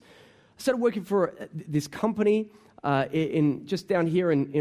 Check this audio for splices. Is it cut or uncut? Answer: uncut